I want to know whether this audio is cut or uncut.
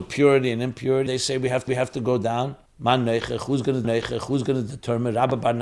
cut